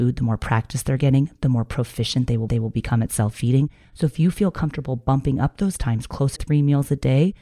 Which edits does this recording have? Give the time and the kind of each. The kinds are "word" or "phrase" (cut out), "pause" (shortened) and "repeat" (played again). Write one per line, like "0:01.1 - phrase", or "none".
0:02.5 - repeat
0:06.4 - word